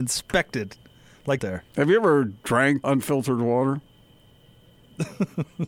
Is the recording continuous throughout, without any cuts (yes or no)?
no